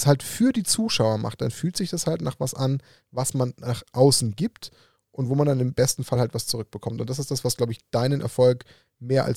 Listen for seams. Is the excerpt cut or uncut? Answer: uncut